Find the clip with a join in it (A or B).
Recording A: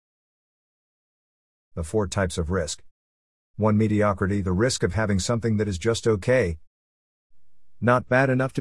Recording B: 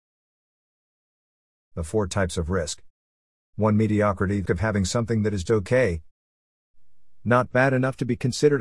B